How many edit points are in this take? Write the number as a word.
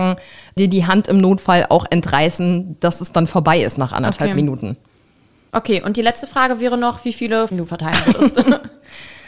one